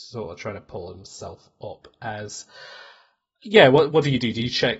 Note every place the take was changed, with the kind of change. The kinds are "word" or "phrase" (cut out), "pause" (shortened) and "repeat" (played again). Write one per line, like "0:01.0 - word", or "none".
none